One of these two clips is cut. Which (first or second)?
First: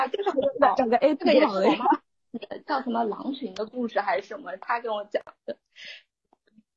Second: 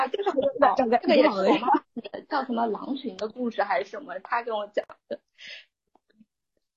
second